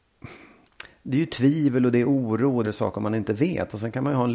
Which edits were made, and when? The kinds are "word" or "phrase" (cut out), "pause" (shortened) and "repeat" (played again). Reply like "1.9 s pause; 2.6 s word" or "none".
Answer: 2.6 s phrase